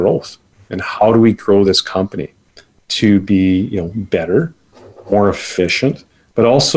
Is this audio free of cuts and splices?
yes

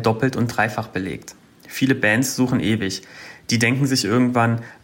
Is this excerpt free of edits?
yes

